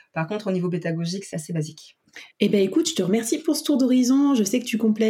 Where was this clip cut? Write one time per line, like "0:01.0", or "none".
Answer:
0:01.3
0:02.3